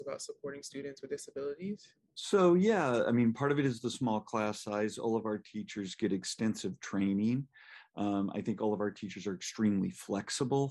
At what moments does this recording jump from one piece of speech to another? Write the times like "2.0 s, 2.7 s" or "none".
2.0 s